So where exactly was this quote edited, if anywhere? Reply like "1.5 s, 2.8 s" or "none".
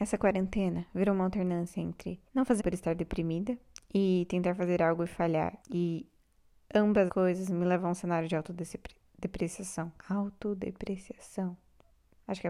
2.3 s, 2.6 s, 5.6 s, 7.1 s, 10.0 s